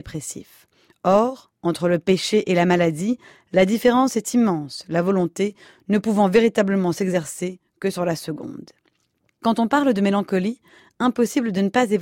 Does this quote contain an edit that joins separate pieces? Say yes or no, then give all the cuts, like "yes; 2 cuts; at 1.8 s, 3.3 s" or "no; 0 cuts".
no; 0 cuts